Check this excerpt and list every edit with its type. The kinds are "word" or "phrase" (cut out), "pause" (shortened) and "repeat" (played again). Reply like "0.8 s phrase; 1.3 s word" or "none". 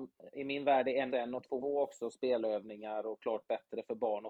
1.1 s word; 1.6 s word